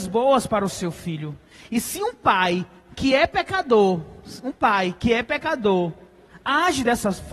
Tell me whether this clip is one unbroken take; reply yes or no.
yes